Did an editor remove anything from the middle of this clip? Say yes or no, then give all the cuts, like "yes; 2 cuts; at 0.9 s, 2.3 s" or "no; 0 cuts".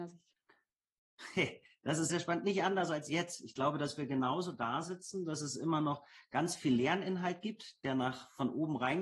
yes; 1 cut; at 2.1 s